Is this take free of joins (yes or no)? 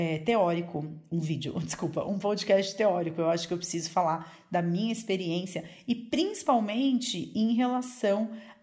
yes